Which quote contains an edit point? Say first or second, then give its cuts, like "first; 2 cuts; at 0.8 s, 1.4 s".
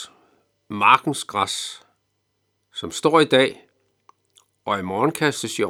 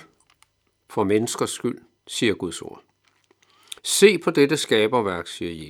second; 2 cuts; at 2.0 s, 3.8 s